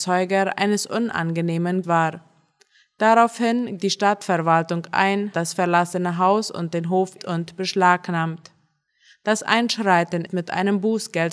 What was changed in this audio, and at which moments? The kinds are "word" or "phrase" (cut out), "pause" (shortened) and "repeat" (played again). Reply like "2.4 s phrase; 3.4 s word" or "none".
1.8 s word; 3.8 s word; 5.3 s word; 7.2 s word; 10.3 s word

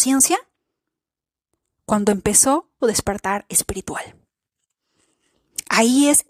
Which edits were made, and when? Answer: 2.8 s word

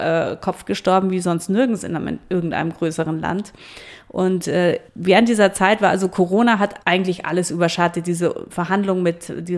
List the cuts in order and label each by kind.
4.9 s pause; 6.8 s pause

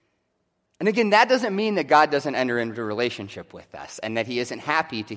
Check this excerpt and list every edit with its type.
none

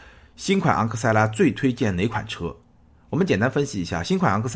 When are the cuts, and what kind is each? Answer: none

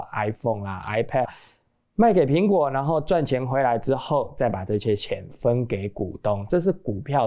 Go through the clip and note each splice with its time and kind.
1.2 s word

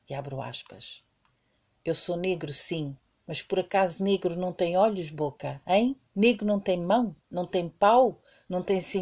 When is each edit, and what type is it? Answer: 6.0 s pause

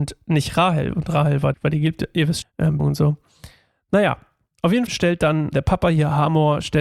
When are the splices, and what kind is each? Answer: 1.5 s word; 2.4 s word; 2.8 s word; 4.9 s word; 5.5 s word

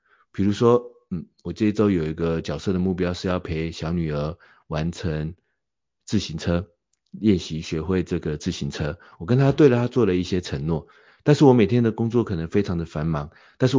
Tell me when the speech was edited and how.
none

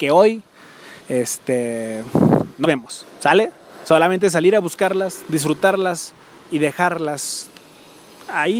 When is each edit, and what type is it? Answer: 1.0 s pause; 2.6 s word; 6.4 s pause

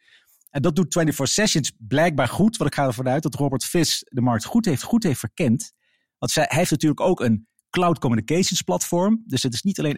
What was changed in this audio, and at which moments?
4.8 s repeat

